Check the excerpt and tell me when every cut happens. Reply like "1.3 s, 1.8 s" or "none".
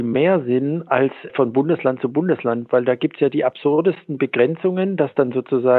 1.3 s